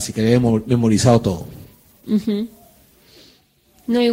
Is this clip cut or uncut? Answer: uncut